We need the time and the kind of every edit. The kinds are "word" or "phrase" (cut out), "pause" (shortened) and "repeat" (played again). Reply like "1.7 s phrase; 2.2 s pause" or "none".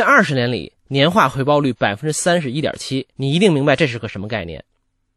3.1 s pause